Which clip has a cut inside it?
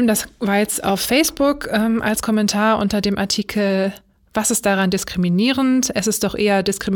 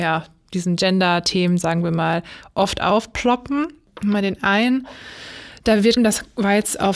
second; 1 cut; at 6.0 s

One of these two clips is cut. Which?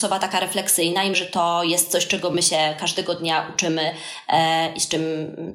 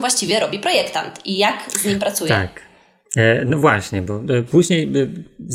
first; 1 cut; at 1.1 s

